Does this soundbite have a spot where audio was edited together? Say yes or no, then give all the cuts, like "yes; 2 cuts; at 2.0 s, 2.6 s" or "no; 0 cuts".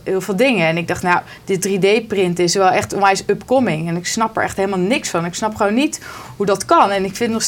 no; 0 cuts